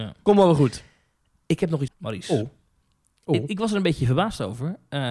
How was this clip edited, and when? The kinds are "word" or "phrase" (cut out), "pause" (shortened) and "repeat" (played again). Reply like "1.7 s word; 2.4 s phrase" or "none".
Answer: 1.9 s word